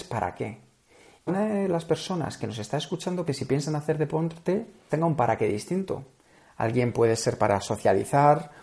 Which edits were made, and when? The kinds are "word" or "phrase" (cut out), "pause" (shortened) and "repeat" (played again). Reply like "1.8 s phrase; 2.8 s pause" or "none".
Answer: 1.3 s word; 3.3 s word; 4.9 s word

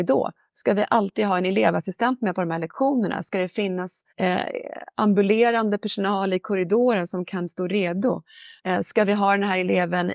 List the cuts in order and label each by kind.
4.1 s pause; 8.6 s pause

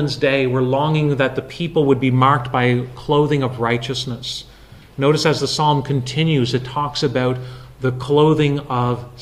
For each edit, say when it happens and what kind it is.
none

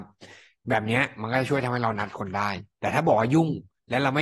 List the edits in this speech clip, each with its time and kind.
2.7 s pause

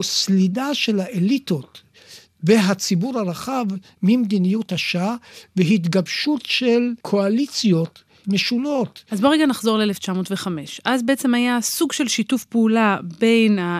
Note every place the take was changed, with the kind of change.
7.0 s pause

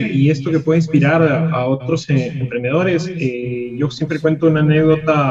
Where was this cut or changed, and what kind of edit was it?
none

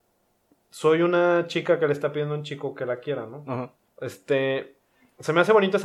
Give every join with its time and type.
3.9 s pause

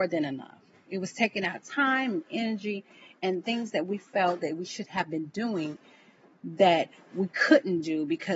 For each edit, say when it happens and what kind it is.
none

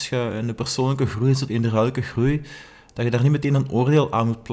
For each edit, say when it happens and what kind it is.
1.5 s word

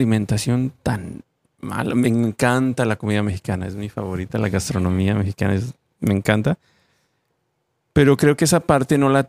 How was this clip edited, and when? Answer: none

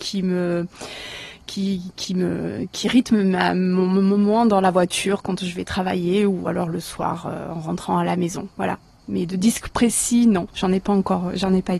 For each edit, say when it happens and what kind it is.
none

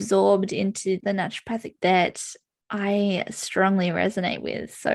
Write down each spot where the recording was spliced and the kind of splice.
1.0 s word; 1.8 s phrase

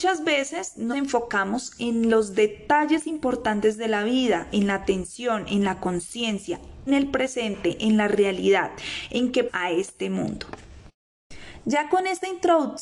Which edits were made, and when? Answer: 0.9 s word; 6.9 s word; 9.5 s word

